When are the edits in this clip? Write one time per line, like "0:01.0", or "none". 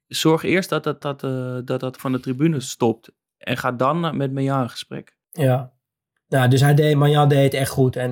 0:01.0
0:02.0
0:05.2